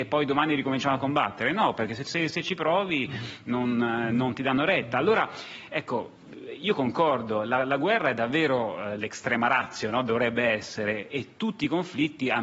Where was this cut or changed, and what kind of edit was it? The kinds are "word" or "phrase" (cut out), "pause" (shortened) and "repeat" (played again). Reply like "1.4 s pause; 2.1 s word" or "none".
none